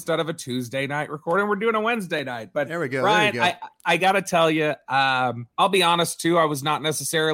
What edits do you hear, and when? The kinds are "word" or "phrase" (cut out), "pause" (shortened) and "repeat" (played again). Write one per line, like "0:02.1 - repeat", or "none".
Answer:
0:05.5 - pause